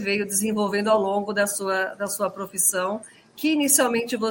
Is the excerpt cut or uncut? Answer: uncut